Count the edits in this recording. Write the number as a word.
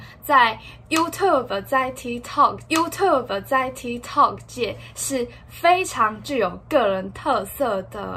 one